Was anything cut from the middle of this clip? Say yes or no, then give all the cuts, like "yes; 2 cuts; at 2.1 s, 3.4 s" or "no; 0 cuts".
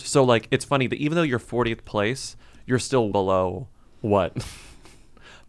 yes; 1 cut; at 3.1 s